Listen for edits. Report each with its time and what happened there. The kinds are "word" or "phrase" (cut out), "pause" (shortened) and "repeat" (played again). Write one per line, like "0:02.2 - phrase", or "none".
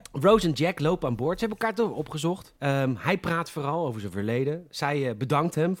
0:02.6 - pause